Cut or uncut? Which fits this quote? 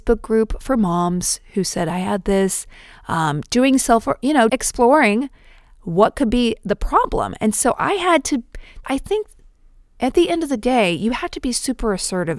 cut